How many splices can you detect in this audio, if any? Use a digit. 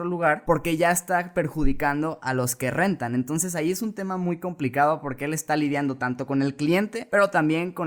0